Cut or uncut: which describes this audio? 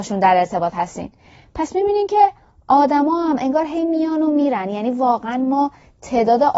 uncut